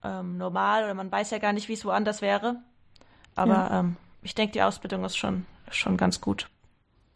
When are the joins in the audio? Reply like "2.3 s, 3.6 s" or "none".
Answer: none

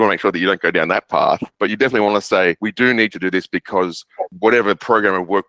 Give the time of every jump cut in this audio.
none

